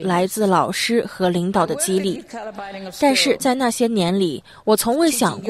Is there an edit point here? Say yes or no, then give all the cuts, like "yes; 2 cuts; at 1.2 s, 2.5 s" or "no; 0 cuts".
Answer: no; 0 cuts